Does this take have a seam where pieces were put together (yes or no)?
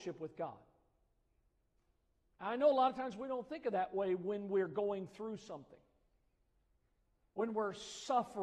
no